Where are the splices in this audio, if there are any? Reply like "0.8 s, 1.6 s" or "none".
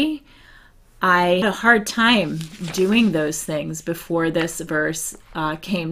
1.4 s

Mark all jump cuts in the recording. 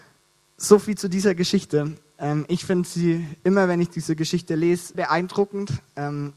4.9 s

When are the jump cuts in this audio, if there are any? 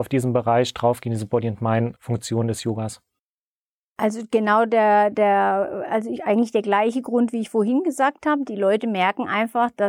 none

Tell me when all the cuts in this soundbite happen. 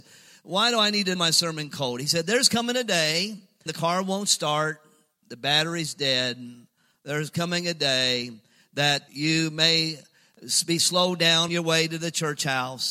1.2 s, 3.7 s, 9.1 s, 11.5 s

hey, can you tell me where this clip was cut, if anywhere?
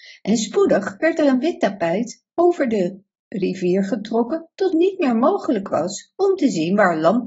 4.7 s

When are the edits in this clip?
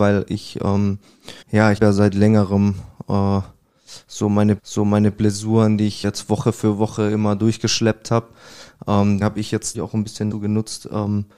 1.4 s, 1.8 s, 4.6 s, 6.0 s, 9.2 s, 9.7 s, 10.3 s

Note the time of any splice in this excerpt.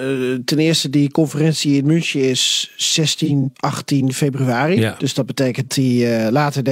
3.5 s, 5.7 s

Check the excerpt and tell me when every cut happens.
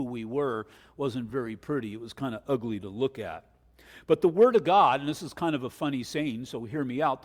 none

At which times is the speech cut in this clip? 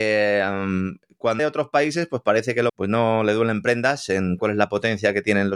1.4 s, 2.7 s, 4.4 s

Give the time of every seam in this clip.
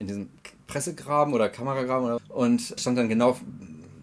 2.2 s, 2.8 s

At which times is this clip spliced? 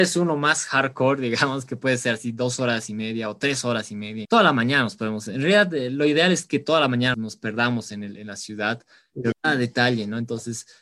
4.2 s, 7.1 s, 9.3 s

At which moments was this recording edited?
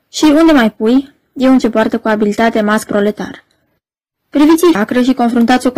1.6 s, 2.9 s, 4.7 s

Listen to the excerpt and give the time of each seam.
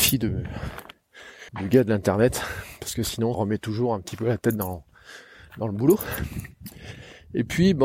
1.5 s, 3.3 s

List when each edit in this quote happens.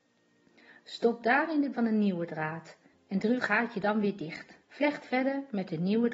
1.7 s, 2.9 s, 3.4 s, 4.6 s

